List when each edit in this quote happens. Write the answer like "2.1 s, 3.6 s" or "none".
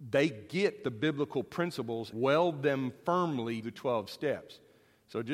2.1 s, 3.6 s